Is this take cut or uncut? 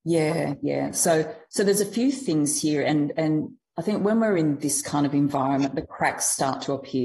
uncut